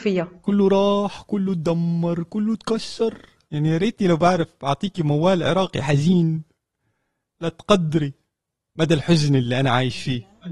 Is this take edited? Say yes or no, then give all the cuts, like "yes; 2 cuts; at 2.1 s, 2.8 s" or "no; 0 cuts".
no; 0 cuts